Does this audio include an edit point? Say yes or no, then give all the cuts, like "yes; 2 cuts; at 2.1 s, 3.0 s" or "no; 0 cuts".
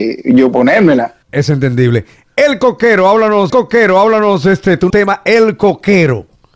yes; 3 cuts; at 1.2 s, 3.5 s, 4.9 s